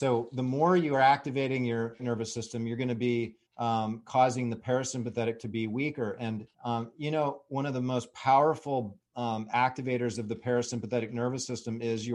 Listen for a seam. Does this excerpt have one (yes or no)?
yes